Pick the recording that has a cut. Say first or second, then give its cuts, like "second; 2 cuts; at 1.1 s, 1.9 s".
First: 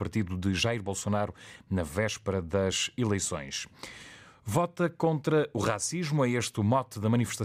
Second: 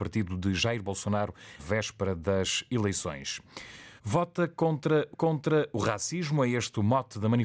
second; 3 cuts; at 1.6 s, 4.0 s, 5.1 s